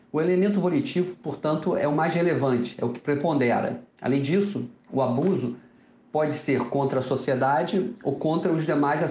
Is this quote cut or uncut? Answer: uncut